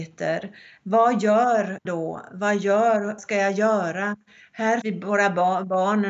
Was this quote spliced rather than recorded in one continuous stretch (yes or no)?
yes